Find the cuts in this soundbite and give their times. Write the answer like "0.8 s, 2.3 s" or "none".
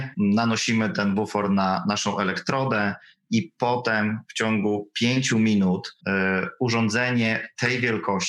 6.0 s